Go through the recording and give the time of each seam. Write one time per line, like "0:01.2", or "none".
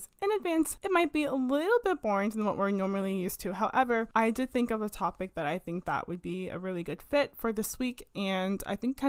none